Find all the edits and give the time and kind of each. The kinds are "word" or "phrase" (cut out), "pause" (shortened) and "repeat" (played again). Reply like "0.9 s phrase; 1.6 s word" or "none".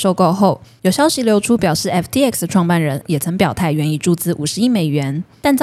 3.0 s word